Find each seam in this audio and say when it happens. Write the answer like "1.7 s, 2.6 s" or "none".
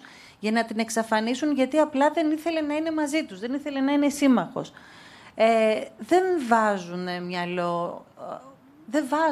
none